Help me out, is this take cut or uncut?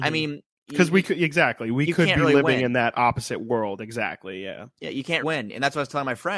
cut